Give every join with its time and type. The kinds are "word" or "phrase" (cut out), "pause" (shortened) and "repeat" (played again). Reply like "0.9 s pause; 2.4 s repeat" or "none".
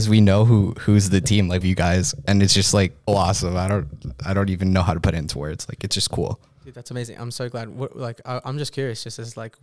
1.6 s phrase; 3.1 s phrase